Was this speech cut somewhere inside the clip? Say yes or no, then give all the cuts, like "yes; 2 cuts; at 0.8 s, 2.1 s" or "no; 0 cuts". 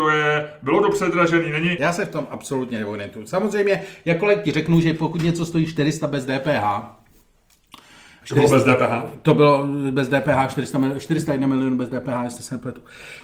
no; 0 cuts